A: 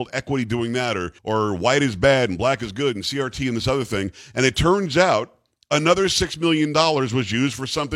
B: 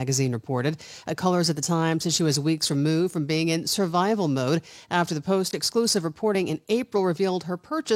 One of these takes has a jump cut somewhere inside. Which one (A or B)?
A